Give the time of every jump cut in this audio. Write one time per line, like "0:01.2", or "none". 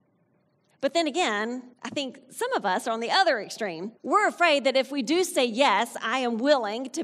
0:01.7
0:04.0